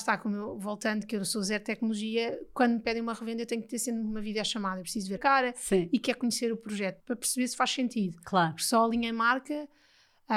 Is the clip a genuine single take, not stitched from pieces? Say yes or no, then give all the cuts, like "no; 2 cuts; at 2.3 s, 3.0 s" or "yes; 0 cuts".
no; 2 cuts; at 5.2 s, 7.0 s